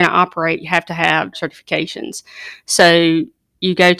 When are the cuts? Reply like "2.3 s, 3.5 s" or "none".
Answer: 1.3 s